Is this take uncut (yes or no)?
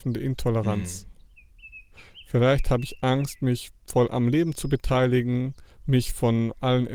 no